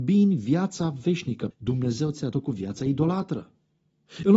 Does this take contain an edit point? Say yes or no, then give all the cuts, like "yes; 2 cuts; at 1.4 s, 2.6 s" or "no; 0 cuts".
yes; 2 cuts; at 1.5 s, 2.3 s